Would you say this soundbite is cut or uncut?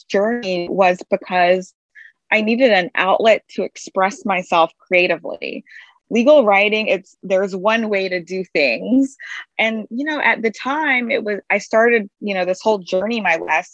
uncut